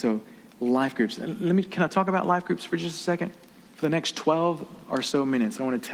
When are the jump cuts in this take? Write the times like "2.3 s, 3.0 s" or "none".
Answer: none